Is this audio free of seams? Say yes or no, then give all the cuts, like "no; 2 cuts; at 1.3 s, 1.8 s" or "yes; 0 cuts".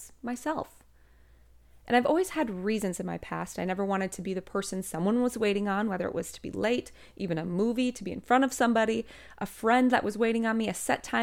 yes; 0 cuts